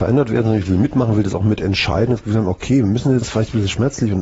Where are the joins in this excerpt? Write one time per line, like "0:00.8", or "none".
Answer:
0:03.2